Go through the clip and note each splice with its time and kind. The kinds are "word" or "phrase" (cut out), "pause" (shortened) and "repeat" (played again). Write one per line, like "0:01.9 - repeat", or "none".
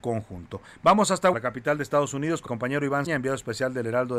0:01.3 - word
0:02.5 - word
0:03.1 - word